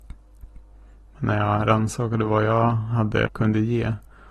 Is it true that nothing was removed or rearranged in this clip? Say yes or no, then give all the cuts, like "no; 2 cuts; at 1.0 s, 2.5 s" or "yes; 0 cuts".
no; 1 cut; at 3.3 s